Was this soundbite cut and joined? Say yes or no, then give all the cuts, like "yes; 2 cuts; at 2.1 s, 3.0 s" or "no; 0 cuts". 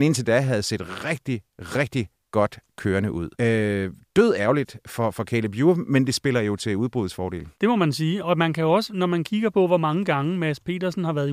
yes; 2 cuts; at 3.3 s, 7.5 s